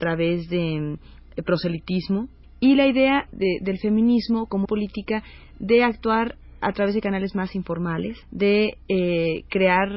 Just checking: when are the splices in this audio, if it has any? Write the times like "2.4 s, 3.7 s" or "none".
2.4 s, 3.3 s, 4.6 s, 8.2 s